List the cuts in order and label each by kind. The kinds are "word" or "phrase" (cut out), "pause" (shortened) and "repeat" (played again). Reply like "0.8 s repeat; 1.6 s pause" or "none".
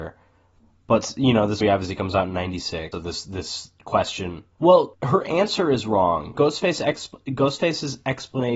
1.6 s word; 2.9 s word; 4.5 s pause; 6.4 s word